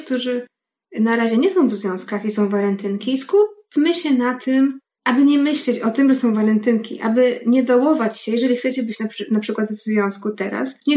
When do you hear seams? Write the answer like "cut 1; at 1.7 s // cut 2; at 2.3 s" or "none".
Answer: none